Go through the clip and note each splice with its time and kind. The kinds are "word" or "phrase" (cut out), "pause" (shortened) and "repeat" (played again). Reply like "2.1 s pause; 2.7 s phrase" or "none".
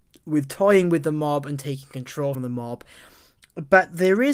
2.3 s word